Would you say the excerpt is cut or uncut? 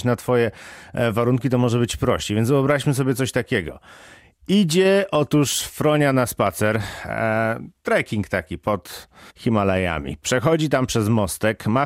uncut